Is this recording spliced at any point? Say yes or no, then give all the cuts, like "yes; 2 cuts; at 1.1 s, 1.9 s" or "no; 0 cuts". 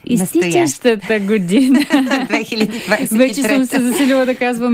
no; 0 cuts